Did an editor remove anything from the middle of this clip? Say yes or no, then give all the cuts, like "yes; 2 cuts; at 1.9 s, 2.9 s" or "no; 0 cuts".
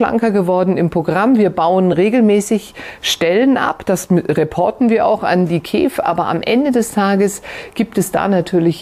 no; 0 cuts